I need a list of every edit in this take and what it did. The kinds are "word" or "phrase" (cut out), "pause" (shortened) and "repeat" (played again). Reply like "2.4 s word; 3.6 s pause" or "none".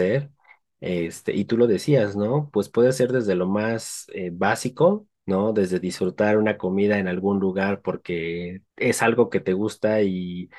5.1 s pause; 8.7 s pause